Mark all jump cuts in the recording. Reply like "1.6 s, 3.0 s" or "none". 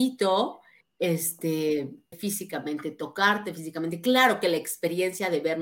2.1 s